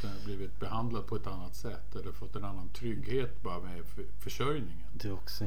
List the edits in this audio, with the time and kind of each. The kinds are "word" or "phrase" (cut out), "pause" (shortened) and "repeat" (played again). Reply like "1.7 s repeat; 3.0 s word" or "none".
none